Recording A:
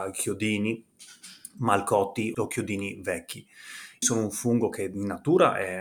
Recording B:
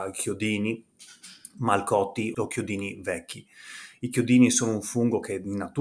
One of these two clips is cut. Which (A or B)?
A